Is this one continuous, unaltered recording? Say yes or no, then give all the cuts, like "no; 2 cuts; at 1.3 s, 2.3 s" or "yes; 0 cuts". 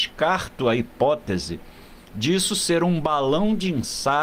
yes; 0 cuts